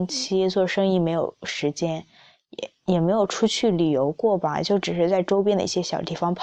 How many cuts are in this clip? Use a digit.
0